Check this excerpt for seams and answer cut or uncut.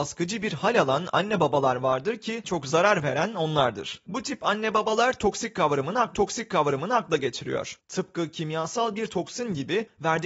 cut